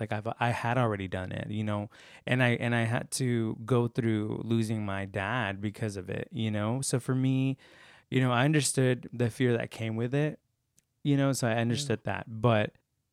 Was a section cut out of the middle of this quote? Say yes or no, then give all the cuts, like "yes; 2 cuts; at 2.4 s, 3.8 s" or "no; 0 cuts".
no; 0 cuts